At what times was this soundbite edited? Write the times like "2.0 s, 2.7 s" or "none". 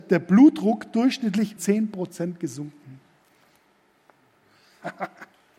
1.6 s